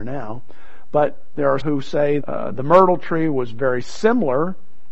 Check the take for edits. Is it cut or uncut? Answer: cut